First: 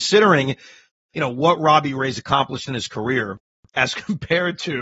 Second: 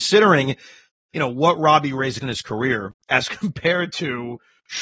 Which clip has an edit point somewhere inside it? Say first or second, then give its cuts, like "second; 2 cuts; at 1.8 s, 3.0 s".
second; 2 cuts; at 2.2 s, 3.0 s